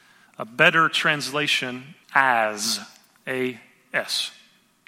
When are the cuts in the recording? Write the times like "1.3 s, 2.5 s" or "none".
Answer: 2.0 s